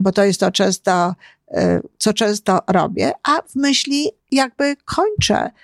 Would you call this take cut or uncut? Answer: cut